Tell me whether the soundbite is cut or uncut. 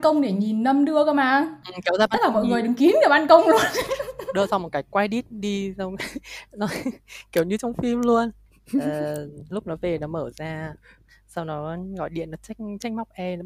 uncut